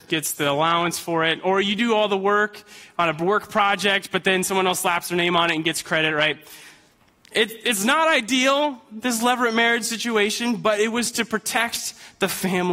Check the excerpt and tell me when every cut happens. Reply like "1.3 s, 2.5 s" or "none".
none